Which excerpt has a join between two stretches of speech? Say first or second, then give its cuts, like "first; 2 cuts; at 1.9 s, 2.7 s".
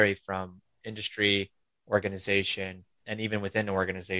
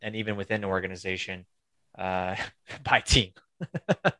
first; 1 cut; at 3.0 s